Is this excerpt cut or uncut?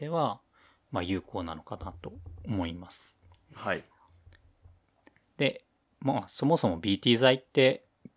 uncut